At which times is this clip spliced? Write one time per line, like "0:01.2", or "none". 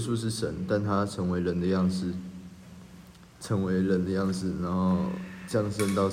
0:03.3